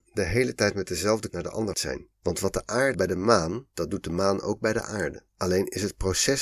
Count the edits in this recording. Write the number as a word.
six